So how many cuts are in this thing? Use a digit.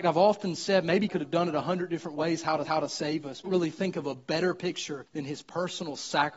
4